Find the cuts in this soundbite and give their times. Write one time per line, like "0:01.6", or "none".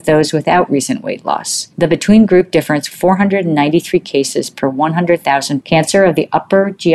0:01.7
0:02.9
0:05.6